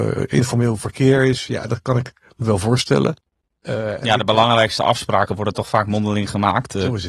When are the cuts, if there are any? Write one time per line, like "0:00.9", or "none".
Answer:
none